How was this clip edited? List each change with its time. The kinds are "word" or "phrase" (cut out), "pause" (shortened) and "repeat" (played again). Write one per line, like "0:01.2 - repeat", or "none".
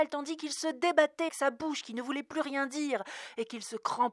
0:01.3 - word